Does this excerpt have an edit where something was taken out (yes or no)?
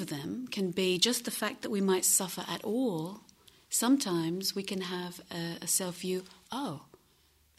no